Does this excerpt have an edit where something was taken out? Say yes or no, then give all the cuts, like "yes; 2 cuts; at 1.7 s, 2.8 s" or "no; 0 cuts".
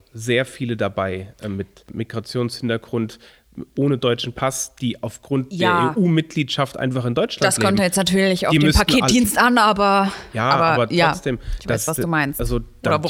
no; 0 cuts